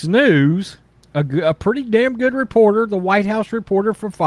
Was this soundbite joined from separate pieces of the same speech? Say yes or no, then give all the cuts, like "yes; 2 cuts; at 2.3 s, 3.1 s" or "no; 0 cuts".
yes; 1 cut; at 1.0 s